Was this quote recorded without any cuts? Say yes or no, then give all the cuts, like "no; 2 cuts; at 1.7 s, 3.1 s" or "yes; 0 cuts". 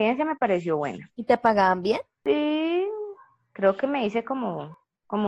yes; 0 cuts